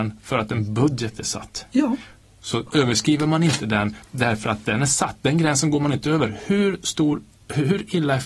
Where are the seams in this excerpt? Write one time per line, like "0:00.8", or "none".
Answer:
none